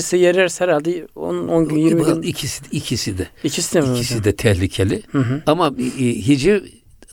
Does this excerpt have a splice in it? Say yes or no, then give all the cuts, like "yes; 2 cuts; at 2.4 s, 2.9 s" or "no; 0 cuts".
no; 0 cuts